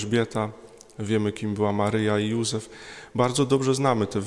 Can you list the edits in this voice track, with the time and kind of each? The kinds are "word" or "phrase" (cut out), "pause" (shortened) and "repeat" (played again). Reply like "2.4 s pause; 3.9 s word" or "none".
none